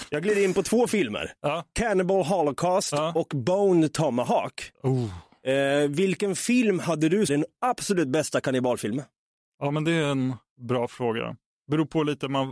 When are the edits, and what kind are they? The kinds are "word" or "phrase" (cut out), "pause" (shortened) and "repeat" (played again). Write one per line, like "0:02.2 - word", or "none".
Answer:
0:07.3 - phrase